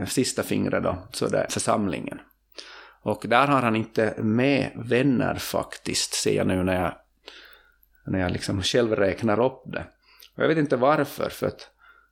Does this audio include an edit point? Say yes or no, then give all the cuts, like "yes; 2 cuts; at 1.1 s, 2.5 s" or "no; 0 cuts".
yes; 1 cut; at 1.5 s